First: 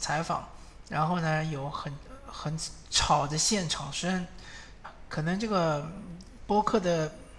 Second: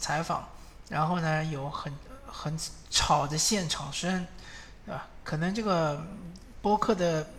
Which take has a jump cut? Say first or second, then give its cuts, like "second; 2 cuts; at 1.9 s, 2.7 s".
first; 1 cut; at 4.8 s